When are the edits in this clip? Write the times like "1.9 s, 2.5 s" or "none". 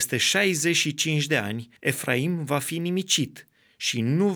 1.8 s

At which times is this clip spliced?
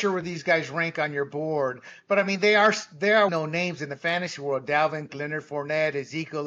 3.3 s, 5.1 s

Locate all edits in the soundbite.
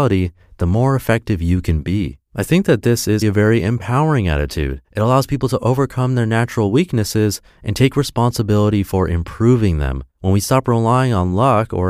2.3 s, 3.2 s, 4.8 s, 10.1 s

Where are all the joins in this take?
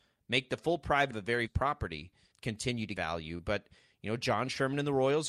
1.1 s, 1.5 s, 2.3 s, 2.9 s

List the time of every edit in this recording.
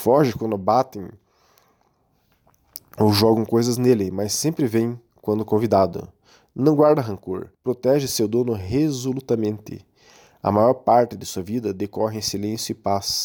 7.5 s

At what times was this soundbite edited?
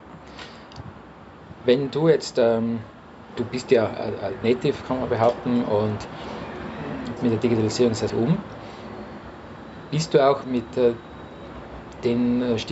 3.3 s, 4.4 s, 7.2 s, 8.1 s, 10.4 s

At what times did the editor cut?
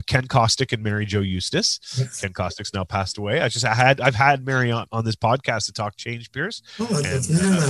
4.9 s

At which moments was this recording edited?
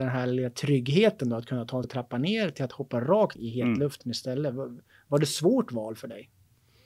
1.8 s, 3.3 s

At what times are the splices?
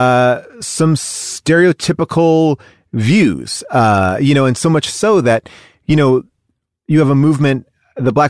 none

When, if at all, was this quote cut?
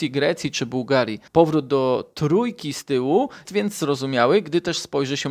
1.3 s, 3.5 s

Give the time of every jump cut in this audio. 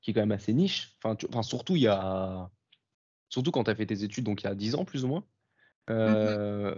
none

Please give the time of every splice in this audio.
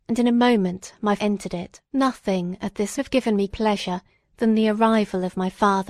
1.2 s, 1.8 s, 3.0 s, 3.5 s

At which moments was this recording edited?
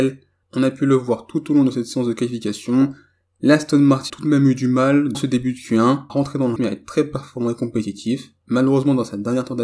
4.1 s, 5.1 s, 6.1 s, 6.6 s

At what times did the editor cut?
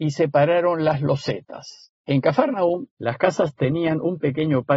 2.0 s, 2.9 s

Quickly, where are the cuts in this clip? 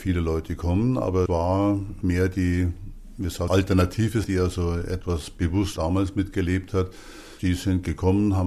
1.3 s, 2.0 s, 3.5 s, 4.2 s, 5.8 s

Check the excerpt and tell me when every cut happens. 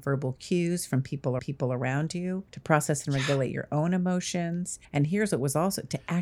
1.4 s, 2.5 s, 4.8 s

